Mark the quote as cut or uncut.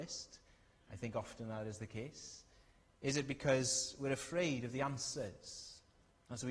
uncut